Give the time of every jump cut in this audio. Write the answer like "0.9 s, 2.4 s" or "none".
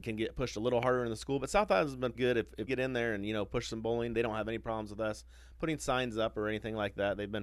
2.1 s, 2.7 s